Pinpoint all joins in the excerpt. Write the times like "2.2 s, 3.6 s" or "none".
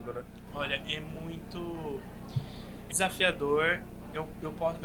2.9 s